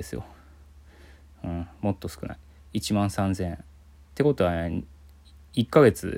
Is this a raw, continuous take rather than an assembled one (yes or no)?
yes